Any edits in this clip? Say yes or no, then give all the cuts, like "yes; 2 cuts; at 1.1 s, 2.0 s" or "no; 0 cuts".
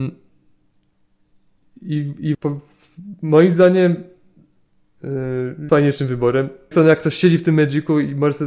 yes; 4 cuts; at 2.3 s, 5.0 s, 5.7 s, 6.7 s